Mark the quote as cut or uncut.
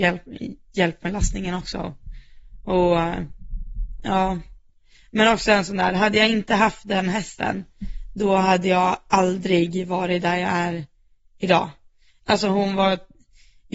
uncut